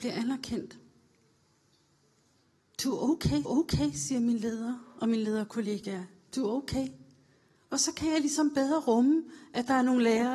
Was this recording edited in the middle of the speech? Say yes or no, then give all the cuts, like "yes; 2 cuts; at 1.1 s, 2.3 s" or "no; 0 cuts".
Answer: yes; 1 cut; at 3.4 s